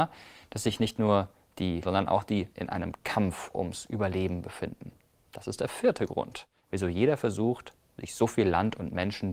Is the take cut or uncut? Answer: cut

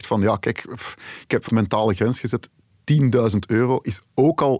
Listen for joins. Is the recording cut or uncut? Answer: cut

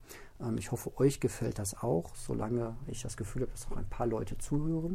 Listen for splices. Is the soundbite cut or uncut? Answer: uncut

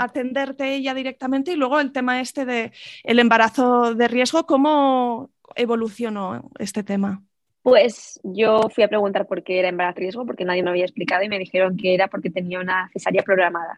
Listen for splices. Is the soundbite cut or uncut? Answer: cut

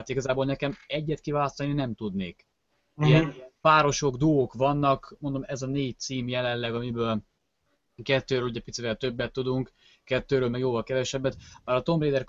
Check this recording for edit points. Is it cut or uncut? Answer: uncut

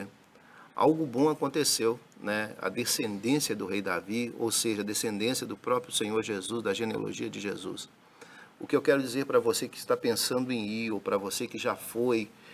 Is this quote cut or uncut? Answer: uncut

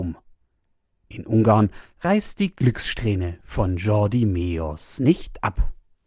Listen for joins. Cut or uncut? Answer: uncut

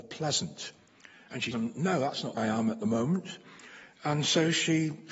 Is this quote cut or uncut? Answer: cut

